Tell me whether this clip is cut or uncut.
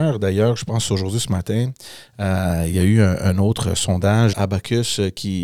cut